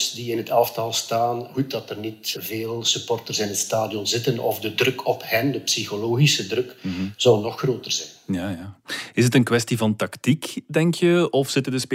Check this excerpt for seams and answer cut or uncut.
uncut